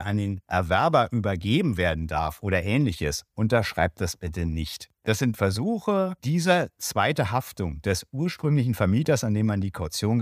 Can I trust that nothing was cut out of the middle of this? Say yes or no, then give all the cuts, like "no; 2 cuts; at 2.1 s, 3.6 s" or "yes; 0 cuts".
no; 1 cut; at 6.2 s